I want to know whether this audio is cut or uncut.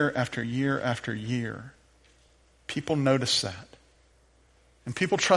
uncut